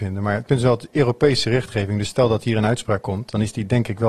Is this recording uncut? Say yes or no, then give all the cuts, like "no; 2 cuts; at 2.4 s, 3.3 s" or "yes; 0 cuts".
yes; 0 cuts